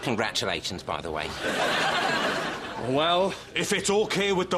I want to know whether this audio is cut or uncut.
uncut